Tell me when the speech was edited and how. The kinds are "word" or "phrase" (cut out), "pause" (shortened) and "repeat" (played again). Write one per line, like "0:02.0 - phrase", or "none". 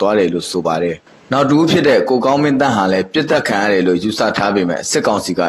0:01.0 - pause